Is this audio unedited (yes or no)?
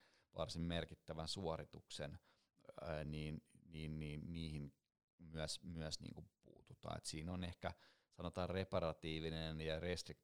yes